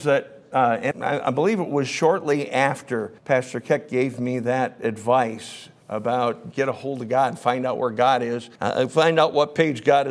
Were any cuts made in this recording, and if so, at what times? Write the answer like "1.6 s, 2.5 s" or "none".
0.9 s, 3.2 s, 6.5 s, 8.6 s